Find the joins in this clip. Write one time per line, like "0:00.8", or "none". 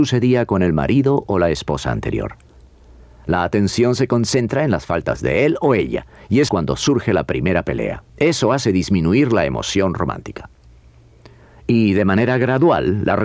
0:06.5
0:08.1